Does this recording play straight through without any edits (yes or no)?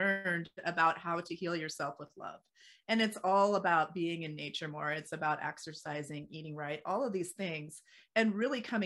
yes